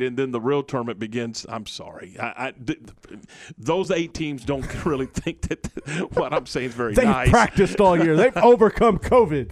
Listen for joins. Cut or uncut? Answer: uncut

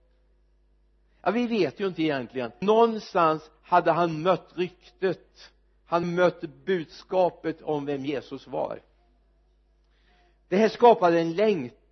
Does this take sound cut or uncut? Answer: cut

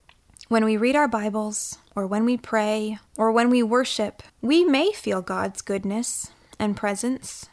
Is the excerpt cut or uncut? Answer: cut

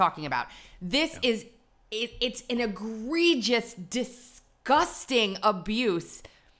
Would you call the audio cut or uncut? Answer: uncut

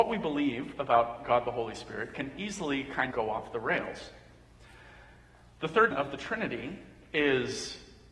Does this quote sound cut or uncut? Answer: cut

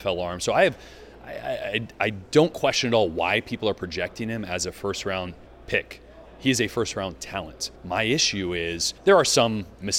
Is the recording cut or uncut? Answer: cut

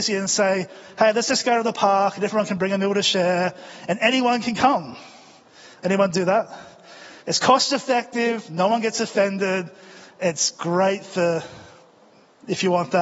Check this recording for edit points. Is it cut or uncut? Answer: cut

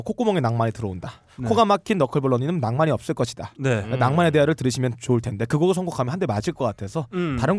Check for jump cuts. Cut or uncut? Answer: uncut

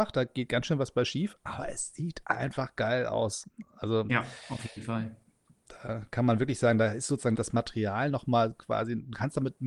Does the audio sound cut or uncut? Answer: cut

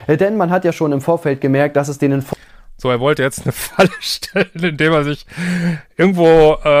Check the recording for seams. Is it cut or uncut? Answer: uncut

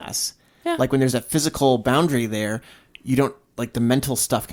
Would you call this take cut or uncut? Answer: uncut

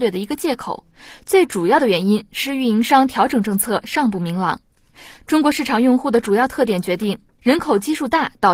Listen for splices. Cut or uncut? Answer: uncut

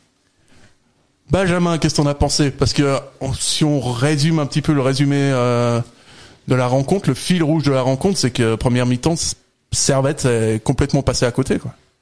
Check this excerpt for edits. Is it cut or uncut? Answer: uncut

